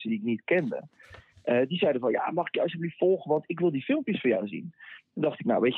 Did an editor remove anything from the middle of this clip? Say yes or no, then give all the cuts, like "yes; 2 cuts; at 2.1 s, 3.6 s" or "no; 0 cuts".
no; 0 cuts